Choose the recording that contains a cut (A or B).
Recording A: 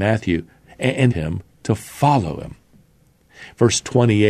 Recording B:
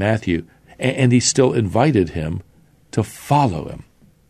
A